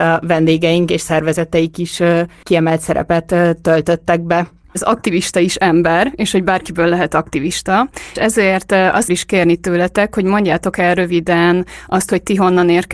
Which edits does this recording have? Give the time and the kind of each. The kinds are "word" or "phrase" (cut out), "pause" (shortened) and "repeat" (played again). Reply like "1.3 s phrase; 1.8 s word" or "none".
2.4 s word; 4.6 s pause; 8.2 s word; 9.1 s phrase